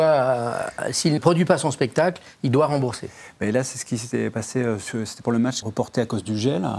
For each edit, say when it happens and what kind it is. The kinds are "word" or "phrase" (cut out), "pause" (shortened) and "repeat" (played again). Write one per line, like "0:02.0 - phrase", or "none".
0:01.2 - word
0:05.6 - phrase